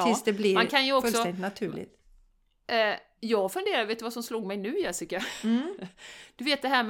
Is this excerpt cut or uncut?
uncut